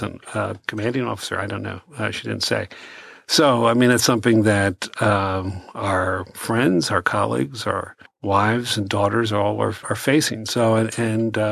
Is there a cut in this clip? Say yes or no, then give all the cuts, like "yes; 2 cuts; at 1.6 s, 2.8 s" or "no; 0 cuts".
yes; 2 cuts; at 8.1 s, 9.8 s